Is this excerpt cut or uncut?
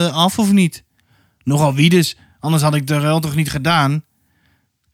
uncut